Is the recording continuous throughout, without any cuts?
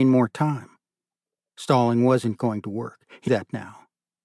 no; 1 cut; at 3.3 s

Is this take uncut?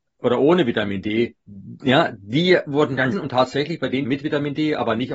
no; 2 cuts; at 3.1 s, 4.0 s

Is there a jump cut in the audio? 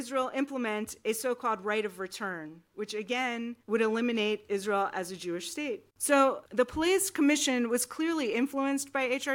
yes; 2 cuts; at 3.6 s, 5.9 s

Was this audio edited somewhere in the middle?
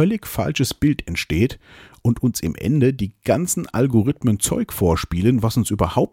no; 0 cuts

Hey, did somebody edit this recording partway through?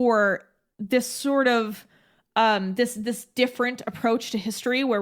no; 0 cuts

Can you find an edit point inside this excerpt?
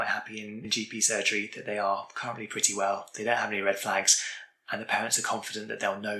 no; 0 cuts

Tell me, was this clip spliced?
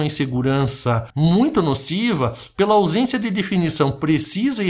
no; 0 cuts

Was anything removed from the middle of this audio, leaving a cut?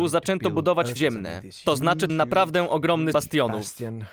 yes; 3 cuts; at 1.0 s, 2.1 s, 3.1 s

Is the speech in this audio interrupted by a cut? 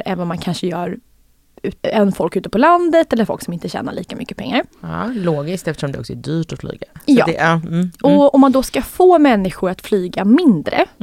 yes; 1 cut; at 1.8 s

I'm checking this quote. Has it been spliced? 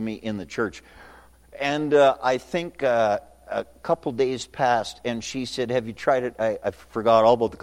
no; 0 cuts

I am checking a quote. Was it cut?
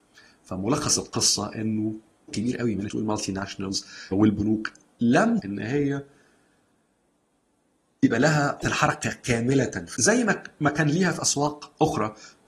yes; 6 cuts; at 2.3 s, 2.9 s, 4.1 s, 5.4 s, 8.6 s, 9.9 s

